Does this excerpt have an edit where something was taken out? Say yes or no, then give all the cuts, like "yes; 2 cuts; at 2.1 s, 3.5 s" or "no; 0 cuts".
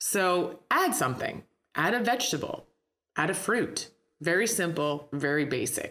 no; 0 cuts